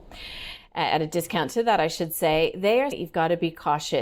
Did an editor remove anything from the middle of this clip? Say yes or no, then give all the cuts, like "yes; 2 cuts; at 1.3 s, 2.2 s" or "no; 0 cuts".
yes; 1 cut; at 2.9 s